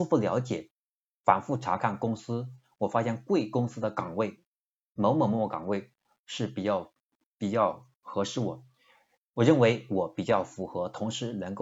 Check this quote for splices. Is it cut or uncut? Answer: uncut